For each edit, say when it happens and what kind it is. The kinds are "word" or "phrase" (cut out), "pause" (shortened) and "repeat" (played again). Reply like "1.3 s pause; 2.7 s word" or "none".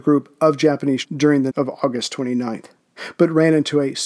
1.0 s phrase; 1.5 s word